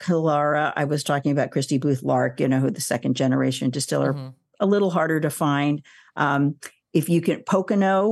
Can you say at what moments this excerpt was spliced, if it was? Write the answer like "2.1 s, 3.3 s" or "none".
none

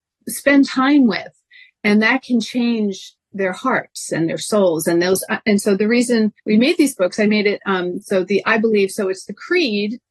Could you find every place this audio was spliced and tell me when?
6.4 s

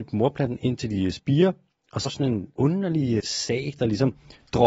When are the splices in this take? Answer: 2.0 s, 2.5 s, 3.2 s

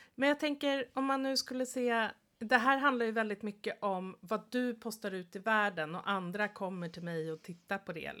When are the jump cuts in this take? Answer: none

